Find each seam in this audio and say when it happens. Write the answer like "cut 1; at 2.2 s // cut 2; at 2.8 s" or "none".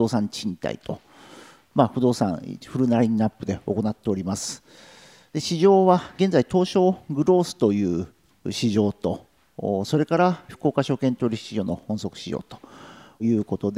none